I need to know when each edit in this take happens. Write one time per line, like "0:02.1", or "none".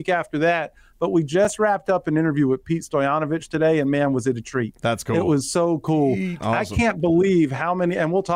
none